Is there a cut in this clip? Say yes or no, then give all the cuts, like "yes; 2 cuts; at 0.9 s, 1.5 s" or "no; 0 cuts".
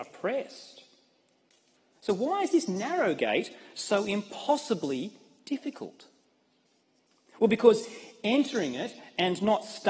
no; 0 cuts